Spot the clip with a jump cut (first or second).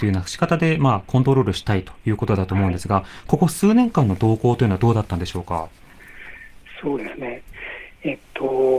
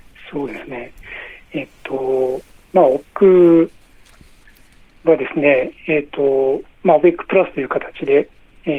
second